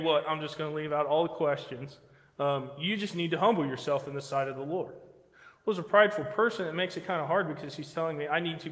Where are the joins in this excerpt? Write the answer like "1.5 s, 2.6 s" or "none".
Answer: none